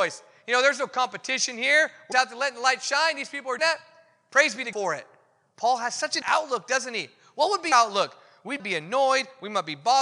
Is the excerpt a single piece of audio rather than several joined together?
no; 6 cuts; at 2.1 s, 3.6 s, 4.7 s, 6.2 s, 7.7 s, 8.6 s

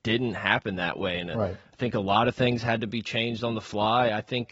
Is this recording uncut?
yes; 0 cuts

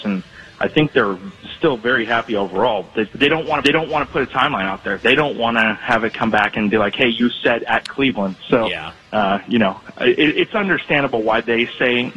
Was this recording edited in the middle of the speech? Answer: yes; 3 cuts; at 3.1 s, 3.6 s, 9.0 s

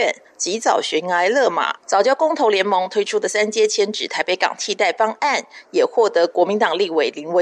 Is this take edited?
yes; 1 cut; at 1.8 s

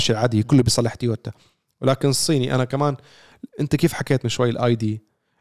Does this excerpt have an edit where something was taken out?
no; 0 cuts

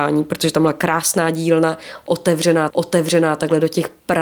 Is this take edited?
yes; 1 cut; at 2.7 s

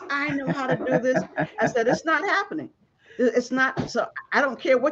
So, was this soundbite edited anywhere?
no; 0 cuts

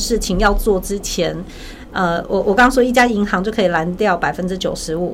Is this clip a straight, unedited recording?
yes; 0 cuts

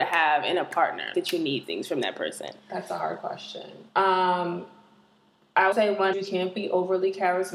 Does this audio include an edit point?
yes; 6 cuts; at 1.1 s, 1.6 s, 2.6 s, 3.9 s, 5.7 s, 6.1 s

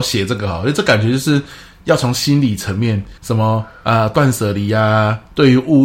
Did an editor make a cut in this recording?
yes; 1 cut; at 3.2 s

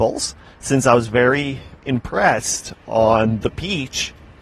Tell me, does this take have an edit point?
yes; 1 cut; at 1.8 s

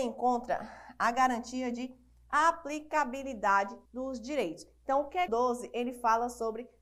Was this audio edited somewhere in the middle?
yes; 2 cuts; at 3.9 s, 5.3 s

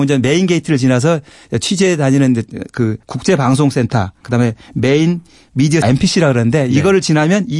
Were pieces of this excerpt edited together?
yes; 2 cuts; at 3.0 s, 5.8 s

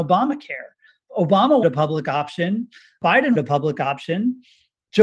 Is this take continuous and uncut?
no; 2 cuts; at 1.6 s, 3.3 s

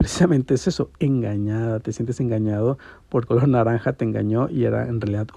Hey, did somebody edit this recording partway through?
yes; 2 cuts; at 0.9 s, 3.3 s

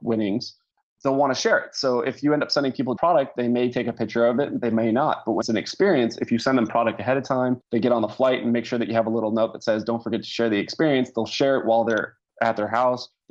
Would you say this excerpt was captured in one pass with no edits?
no; 3 cuts; at 3.0 s, 5.4 s, 7.7 s

